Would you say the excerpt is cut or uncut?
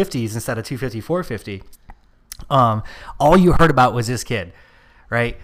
uncut